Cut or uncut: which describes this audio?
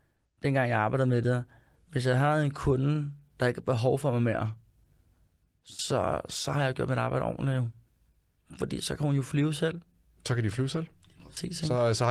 uncut